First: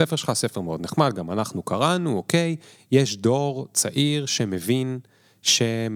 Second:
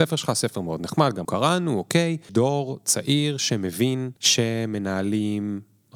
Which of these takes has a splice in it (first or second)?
second